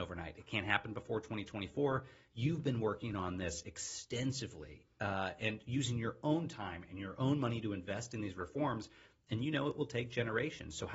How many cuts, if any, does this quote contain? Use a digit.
0